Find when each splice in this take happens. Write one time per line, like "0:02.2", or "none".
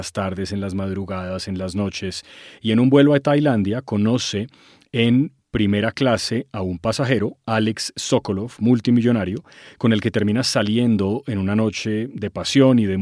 none